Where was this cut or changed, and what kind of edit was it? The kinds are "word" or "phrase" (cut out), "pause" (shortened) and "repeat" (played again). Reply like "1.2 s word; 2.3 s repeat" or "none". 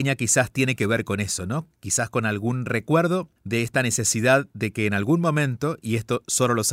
3.4 s pause